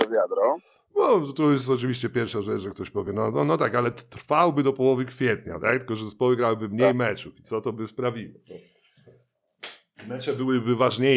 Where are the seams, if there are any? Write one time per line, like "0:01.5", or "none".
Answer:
none